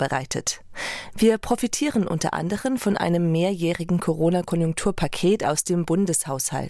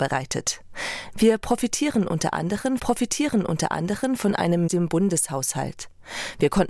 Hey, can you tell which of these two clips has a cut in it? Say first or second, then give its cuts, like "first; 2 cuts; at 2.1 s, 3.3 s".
second; 2 cuts; at 2.8 s, 4.7 s